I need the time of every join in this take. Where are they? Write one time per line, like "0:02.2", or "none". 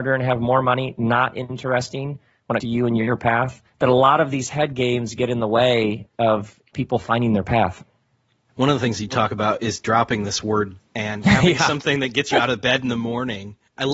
0:02.6
0:03.7
0:06.1
0:10.8

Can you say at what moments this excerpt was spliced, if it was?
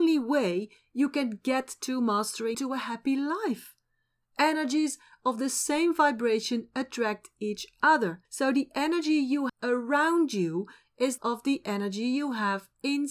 0:02.5
0:08.2
0:09.5
0:11.2

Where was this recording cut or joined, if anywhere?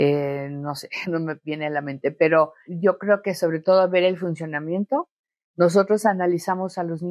0:01.0
0:02.7

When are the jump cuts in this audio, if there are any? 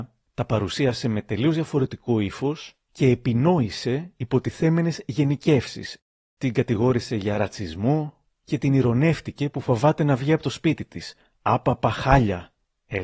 none

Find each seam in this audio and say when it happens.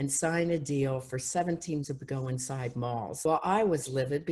0:01.8

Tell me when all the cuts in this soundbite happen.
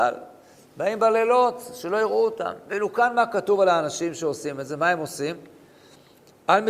none

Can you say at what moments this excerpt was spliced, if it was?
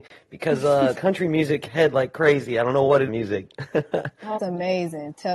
0:00.9
0:01.7
0:03.1
0:04.4

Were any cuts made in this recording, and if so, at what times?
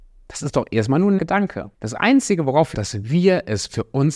0:01.2
0:01.7
0:02.7

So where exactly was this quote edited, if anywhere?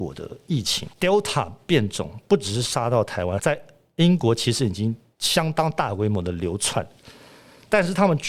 0:00.9
0:03.4

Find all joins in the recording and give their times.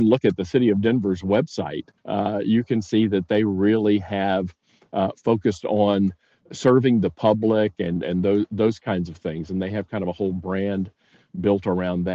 0:02.0

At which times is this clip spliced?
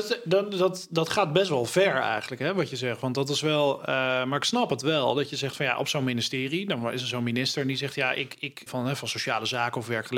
0:08.7

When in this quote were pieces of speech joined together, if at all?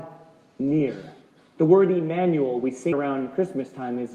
0:02.9

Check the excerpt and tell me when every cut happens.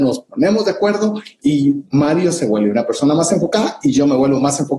0:01.9

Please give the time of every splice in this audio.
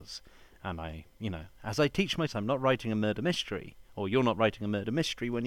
0:02.3

